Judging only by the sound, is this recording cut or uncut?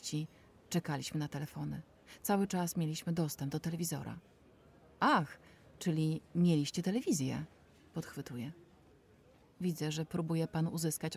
uncut